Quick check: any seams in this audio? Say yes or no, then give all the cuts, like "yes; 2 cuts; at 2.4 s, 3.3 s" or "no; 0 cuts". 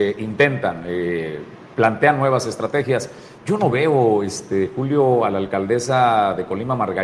no; 0 cuts